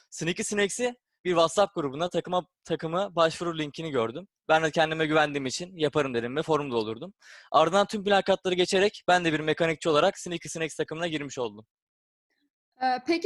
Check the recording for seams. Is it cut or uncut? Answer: uncut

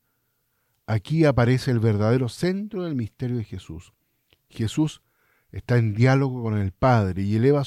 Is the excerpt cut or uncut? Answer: uncut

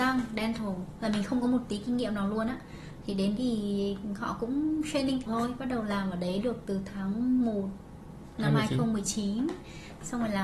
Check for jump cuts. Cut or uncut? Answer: cut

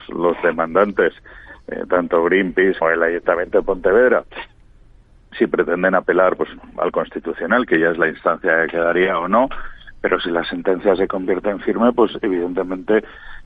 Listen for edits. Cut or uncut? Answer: cut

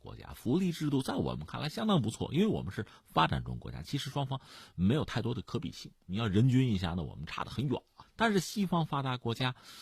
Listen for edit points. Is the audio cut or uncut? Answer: uncut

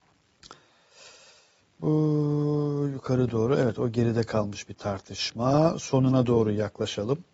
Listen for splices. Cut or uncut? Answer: uncut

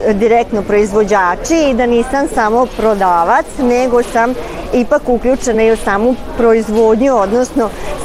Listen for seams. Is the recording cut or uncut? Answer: uncut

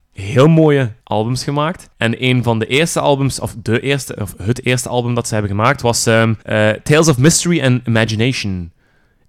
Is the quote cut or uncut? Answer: cut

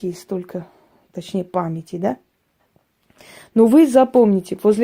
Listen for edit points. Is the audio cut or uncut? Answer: uncut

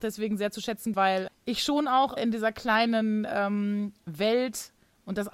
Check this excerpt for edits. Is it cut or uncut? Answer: cut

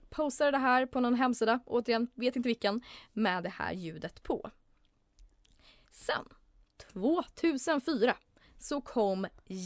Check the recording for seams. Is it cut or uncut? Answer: uncut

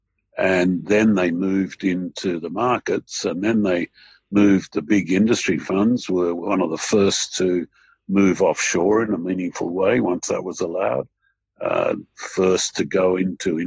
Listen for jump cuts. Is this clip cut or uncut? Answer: uncut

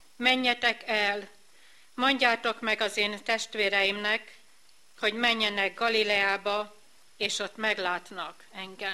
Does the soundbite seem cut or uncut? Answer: uncut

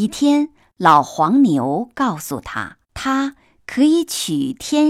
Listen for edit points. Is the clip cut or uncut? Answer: cut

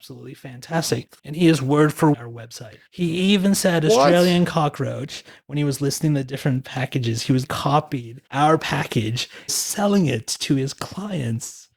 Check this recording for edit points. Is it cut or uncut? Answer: cut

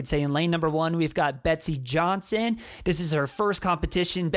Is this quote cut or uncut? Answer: uncut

